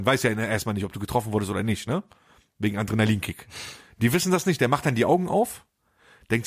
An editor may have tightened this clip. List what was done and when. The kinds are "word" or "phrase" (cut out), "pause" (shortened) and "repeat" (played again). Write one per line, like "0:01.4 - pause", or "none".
none